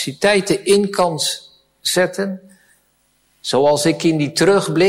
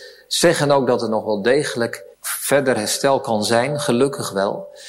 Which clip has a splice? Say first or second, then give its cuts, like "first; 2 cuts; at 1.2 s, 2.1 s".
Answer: second; 1 cut; at 2.1 s